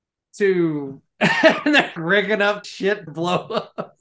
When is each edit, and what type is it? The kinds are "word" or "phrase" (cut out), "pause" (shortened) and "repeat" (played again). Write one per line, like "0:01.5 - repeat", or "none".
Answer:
0:02.0 - word
0:02.6 - word
0:03.1 - word